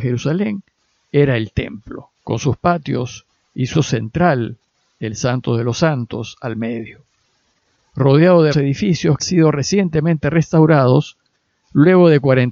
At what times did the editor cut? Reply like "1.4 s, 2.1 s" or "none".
2.2 s, 3.7 s, 8.5 s, 9.2 s